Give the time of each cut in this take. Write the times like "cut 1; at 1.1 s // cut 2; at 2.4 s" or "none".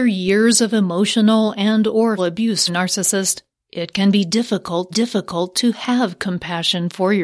cut 1; at 2.2 s // cut 2; at 2.7 s // cut 3; at 4.9 s